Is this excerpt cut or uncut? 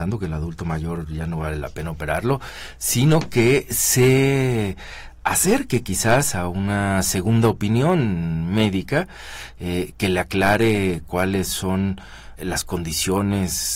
cut